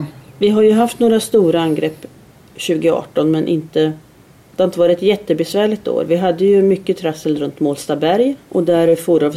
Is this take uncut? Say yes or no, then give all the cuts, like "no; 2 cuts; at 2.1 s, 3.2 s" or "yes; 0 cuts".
yes; 0 cuts